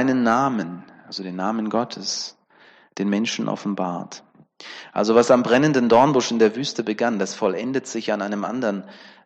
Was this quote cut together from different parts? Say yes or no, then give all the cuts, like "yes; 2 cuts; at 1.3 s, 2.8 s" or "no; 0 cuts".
no; 0 cuts